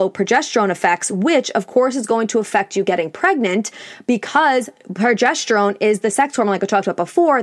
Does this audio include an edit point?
no; 0 cuts

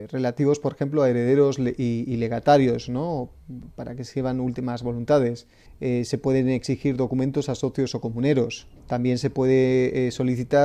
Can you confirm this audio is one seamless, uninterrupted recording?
no; 2 cuts; at 5.7 s, 8.8 s

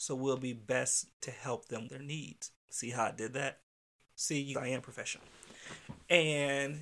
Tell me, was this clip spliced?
yes; 3 cuts; at 1.2 s, 1.9 s, 4.5 s

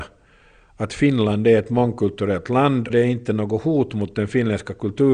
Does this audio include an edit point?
yes; 1 cut; at 2.9 s

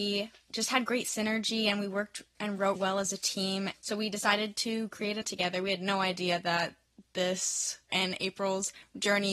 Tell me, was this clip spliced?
yes; 4 cuts; at 2.8 s, 3.7 s, 5.2 s, 7.9 s

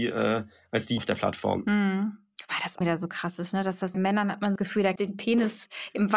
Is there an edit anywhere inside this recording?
yes; 5 cuts; at 1.0 s, 2.8 s, 3.9 s, 4.6 s, 5.0 s

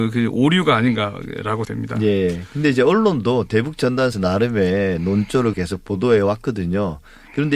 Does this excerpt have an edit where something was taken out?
yes; 3 cuts; at 1.6 s, 4.1 s, 5.5 s

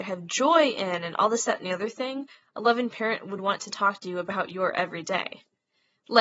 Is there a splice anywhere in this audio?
no; 0 cuts

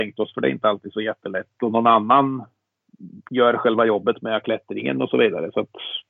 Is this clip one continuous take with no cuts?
yes; 0 cuts

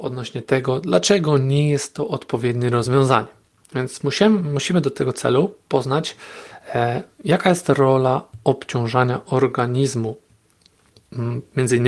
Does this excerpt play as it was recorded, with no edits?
yes; 0 cuts

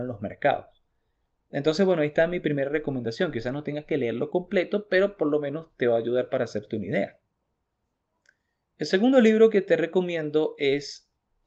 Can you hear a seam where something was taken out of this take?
no; 0 cuts

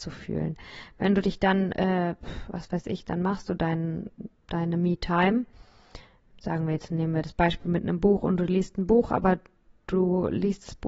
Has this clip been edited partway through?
no; 0 cuts

